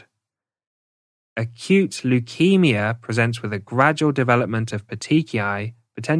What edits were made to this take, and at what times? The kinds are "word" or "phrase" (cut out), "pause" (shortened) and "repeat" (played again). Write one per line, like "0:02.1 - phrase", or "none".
none